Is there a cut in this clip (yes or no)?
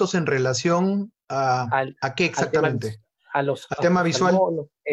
no